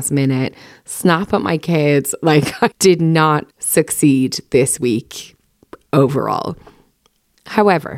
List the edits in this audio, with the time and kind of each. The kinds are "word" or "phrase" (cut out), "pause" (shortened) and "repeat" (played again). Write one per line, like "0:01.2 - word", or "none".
0:02.7 - word
0:03.5 - pause